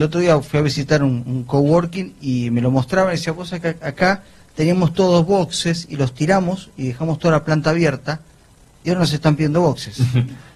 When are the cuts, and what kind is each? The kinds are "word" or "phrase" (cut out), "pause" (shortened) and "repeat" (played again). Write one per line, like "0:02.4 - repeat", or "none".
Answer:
none

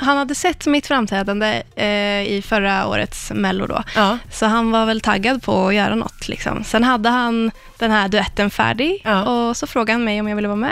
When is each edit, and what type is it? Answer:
none

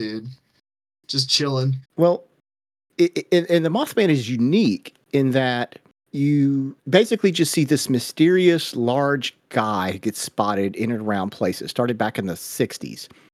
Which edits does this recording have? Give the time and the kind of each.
0:01.8 - pause
0:06.8 - pause

